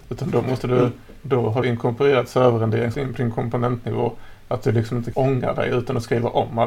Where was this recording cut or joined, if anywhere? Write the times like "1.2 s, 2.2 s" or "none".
1.2 s, 1.6 s, 2.9 s, 5.1 s